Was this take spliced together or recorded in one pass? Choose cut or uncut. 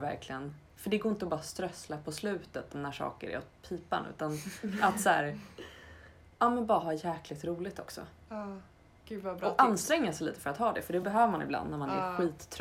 uncut